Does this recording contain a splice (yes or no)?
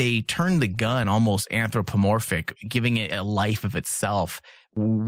no